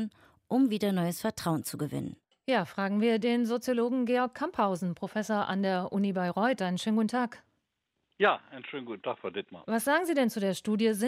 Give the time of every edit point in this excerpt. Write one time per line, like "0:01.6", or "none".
none